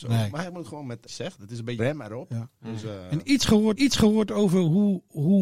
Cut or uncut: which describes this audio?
cut